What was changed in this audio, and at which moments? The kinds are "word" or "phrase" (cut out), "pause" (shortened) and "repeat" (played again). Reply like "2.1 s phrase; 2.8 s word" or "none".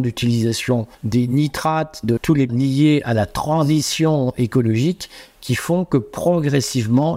0.9 s pause; 2.2 s word; 2.5 s word

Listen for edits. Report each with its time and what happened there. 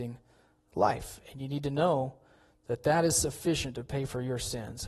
none

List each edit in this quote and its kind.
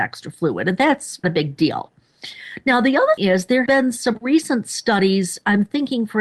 1.2 s word; 3.2 s word; 3.7 s word

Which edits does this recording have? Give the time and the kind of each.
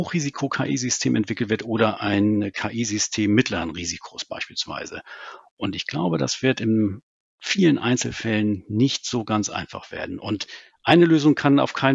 none

